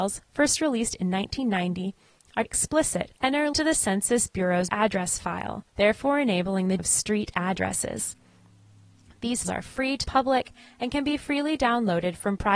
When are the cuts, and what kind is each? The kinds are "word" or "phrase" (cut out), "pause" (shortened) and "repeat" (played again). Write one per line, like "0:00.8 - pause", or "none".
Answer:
0:02.5 - word
0:03.2 - pause
0:03.5 - word
0:04.7 - word
0:05.7 - pause
0:06.8 - word
0:09.4 - word
0:10.0 - word